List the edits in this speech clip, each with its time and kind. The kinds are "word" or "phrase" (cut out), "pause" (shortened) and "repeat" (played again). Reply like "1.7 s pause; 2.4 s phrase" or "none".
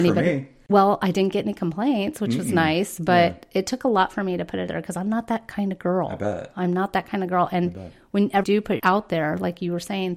4.7 s word; 8.4 s word; 8.8 s word